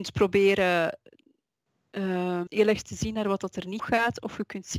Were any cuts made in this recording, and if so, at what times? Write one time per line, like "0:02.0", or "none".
0:02.5
0:03.8

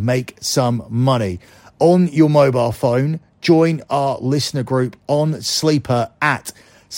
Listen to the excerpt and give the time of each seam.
none

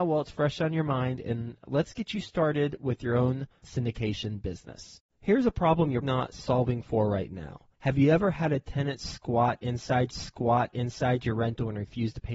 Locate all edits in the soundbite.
0:03.6
0:05.1
0:06.0
0:07.7
0:10.1

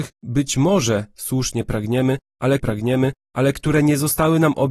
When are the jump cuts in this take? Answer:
0:02.6

